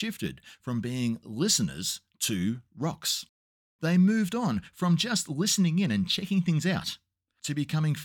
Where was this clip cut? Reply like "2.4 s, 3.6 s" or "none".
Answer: none